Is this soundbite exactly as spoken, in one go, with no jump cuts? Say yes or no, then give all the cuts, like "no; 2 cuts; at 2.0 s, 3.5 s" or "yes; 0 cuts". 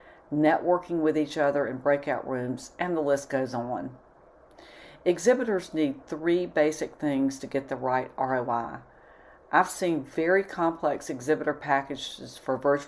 yes; 0 cuts